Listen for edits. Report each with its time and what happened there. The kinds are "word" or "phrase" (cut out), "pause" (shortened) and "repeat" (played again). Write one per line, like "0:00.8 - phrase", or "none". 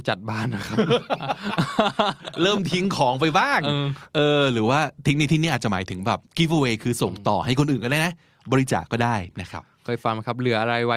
0:06.3 - pause